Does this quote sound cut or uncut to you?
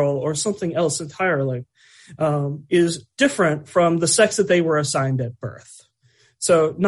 uncut